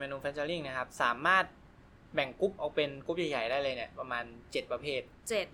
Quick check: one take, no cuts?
yes; 0 cuts

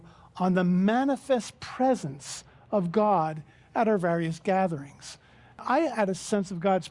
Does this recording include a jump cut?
no; 0 cuts

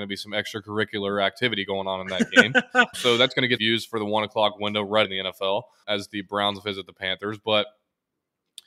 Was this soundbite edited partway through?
yes; 4 cuts; at 2.9 s, 3.6 s, 5.0 s, 5.8 s

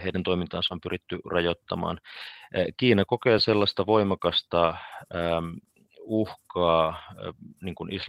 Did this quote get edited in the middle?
no; 0 cuts

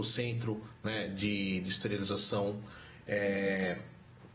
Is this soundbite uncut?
yes; 0 cuts

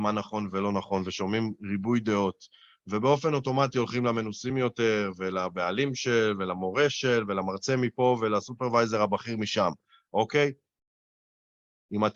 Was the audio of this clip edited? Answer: no; 0 cuts

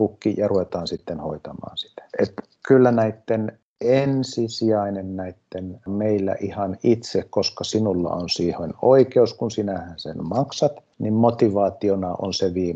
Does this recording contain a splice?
yes; 2 cuts; at 2.1 s, 5.9 s

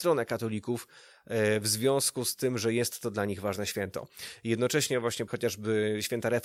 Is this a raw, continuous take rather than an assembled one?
no; 1 cut; at 5.3 s

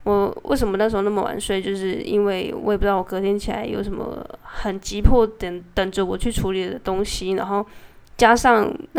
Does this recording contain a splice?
no; 0 cuts

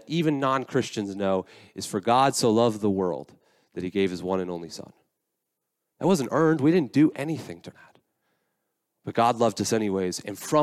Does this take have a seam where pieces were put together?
yes; 1 cut; at 7.7 s

